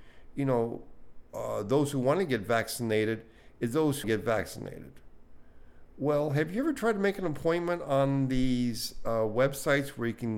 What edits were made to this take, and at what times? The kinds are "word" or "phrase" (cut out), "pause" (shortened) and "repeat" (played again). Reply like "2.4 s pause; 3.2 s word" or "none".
4.0 s phrase